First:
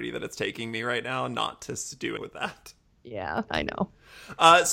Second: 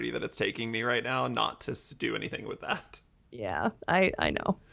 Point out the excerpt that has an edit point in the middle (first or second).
first